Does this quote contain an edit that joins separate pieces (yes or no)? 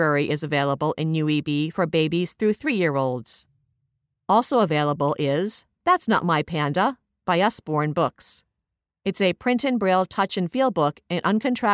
no